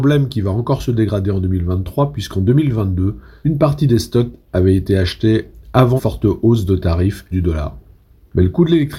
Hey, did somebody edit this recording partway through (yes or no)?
yes